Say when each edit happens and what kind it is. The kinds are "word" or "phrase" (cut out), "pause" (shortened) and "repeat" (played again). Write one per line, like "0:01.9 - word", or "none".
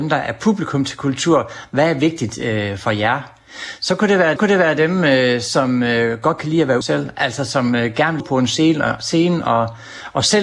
0:04.4 - repeat
0:06.8 - word
0:08.2 - word